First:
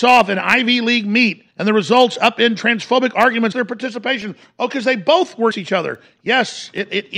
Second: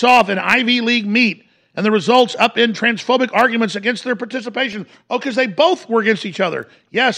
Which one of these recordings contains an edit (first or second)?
first